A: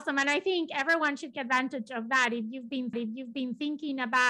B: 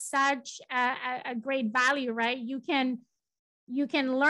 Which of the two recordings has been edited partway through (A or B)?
A